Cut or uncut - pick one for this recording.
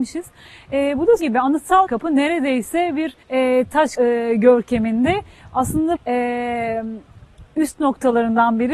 cut